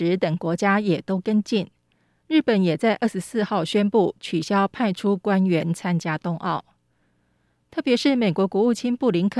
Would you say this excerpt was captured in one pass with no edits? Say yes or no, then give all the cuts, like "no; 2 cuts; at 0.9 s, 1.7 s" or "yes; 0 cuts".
yes; 0 cuts